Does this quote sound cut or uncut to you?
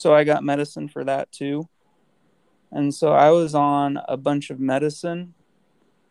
uncut